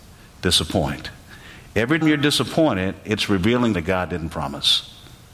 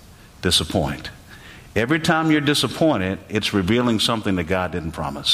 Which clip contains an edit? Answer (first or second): first